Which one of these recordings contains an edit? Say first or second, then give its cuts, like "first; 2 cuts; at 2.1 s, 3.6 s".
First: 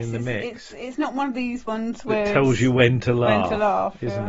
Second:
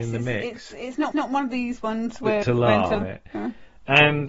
second; 3 cuts; at 1.1 s, 2.4 s, 3.0 s